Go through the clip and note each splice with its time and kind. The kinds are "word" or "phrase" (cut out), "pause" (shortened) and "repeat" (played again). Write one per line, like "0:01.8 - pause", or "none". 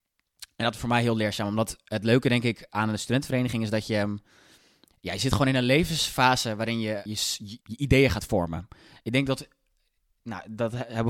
0:07.1 - word
0:07.6 - word